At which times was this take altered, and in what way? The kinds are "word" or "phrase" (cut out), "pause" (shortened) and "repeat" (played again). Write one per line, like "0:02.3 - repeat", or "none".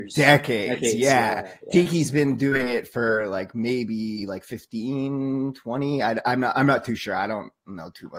none